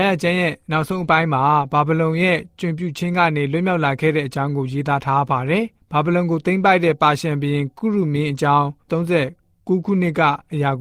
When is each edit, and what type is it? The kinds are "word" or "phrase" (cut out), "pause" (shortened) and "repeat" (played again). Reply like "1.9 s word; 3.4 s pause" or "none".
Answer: 8.9 s word